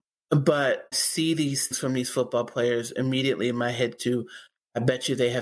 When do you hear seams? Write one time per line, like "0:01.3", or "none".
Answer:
0:00.9
0:01.7
0:04.0